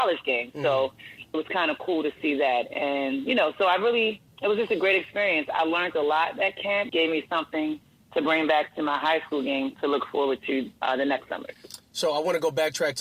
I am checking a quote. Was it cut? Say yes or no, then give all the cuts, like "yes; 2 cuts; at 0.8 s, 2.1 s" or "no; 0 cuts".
yes; 5 cuts; at 1.3 s, 4.3 s, 6.9 s, 10.8 s, 11.8 s